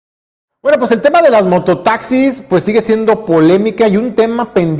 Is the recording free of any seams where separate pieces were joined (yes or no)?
yes